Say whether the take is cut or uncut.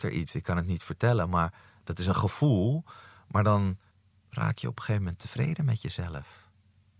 cut